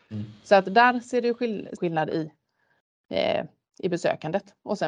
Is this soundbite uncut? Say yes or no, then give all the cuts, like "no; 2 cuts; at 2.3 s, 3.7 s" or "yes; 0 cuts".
no; 1 cut; at 1.8 s